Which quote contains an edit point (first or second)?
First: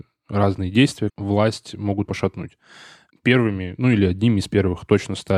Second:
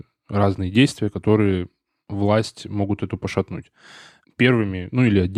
first